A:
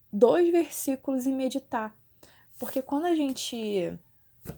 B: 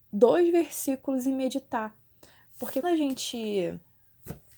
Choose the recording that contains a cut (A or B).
B